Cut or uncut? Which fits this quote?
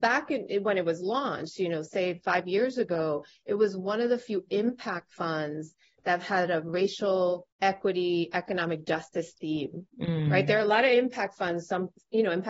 cut